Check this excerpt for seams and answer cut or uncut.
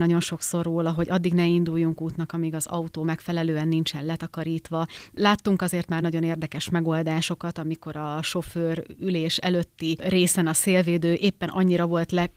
uncut